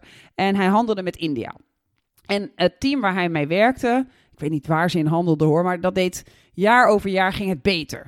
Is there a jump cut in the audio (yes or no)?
no